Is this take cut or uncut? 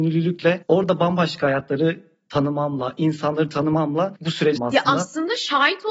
cut